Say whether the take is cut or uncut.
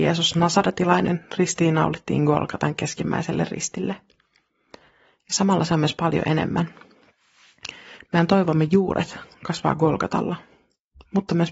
uncut